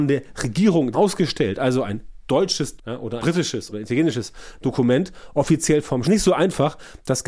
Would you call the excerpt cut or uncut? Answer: cut